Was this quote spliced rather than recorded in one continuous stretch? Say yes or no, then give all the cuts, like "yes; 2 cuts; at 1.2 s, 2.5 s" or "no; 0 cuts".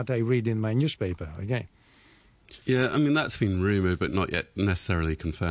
yes; 1 cut; at 2.6 s